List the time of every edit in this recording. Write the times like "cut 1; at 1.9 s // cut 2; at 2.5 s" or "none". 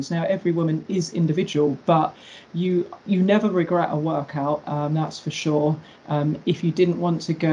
cut 1; at 3.0 s